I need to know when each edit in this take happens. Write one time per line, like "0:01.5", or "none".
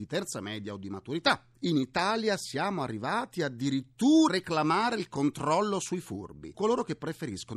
0:04.3
0:06.5